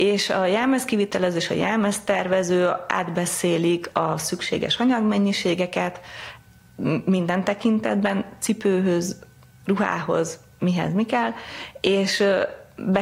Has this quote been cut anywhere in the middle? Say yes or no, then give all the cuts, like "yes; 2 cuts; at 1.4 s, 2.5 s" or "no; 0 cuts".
no; 0 cuts